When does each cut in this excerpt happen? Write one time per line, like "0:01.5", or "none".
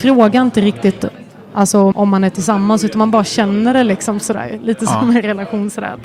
0:01.9